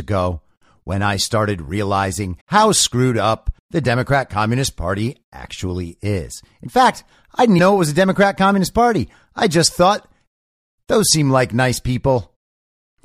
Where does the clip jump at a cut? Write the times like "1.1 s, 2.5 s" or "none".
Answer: 2.4 s, 3.6 s, 7.6 s